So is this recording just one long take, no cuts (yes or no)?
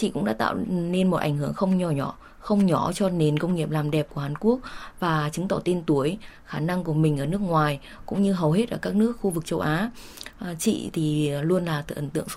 yes